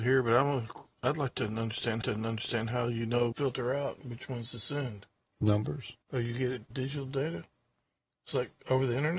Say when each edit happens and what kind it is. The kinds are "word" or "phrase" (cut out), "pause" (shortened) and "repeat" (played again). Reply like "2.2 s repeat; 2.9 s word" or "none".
2.0 s repeat; 3.3 s phrase; 6.0 s pause; 6.7 s word